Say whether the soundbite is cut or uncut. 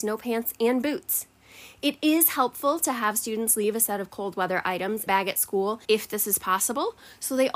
cut